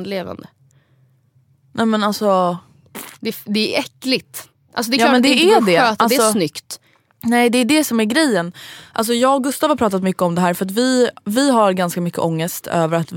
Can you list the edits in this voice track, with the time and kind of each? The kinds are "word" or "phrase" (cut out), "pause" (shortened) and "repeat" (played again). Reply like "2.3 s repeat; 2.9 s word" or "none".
none